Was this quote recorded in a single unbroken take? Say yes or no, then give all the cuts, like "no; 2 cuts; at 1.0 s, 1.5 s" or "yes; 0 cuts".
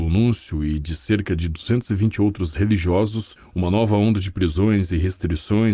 yes; 0 cuts